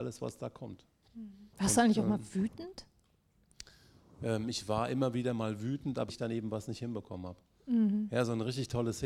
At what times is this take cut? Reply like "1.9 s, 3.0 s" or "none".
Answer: 1.5 s, 6.1 s

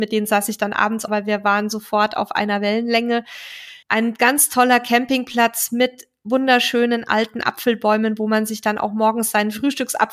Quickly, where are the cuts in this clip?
1.1 s, 3.8 s

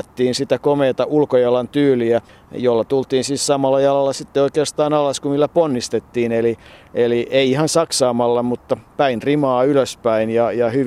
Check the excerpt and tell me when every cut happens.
none

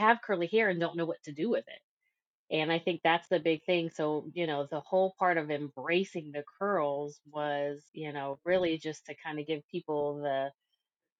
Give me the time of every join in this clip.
7.9 s

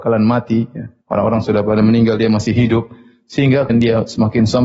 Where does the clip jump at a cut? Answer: 1.0 s, 3.7 s

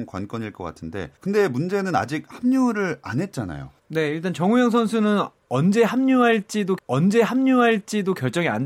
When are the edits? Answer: 1.2 s, 3.8 s, 6.8 s

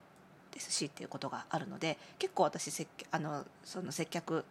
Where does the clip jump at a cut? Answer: 3.6 s

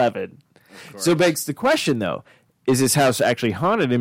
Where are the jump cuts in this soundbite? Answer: none

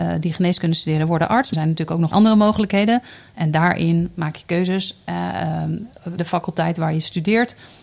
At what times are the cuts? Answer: 1.5 s, 2.1 s, 6.2 s

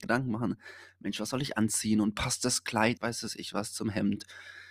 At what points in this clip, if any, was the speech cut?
3.0 s

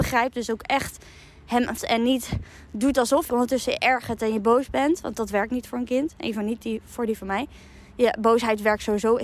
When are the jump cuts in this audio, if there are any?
1.8 s, 3.3 s, 5.1 s

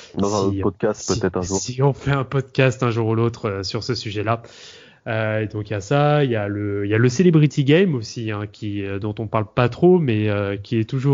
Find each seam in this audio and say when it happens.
none

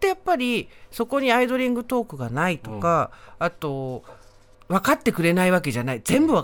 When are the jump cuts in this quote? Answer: 4.5 s

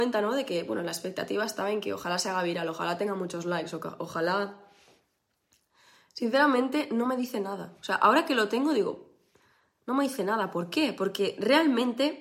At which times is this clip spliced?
none

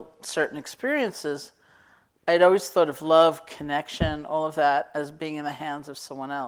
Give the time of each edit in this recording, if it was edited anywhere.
none

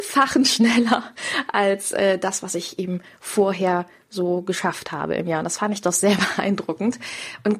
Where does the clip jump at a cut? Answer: none

